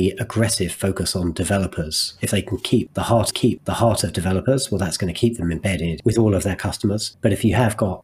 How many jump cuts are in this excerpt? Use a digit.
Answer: 1